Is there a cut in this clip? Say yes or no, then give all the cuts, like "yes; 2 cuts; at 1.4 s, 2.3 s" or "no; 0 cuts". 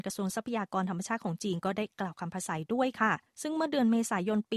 yes; 1 cut; at 3.3 s